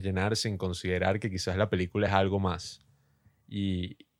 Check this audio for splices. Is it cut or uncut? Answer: uncut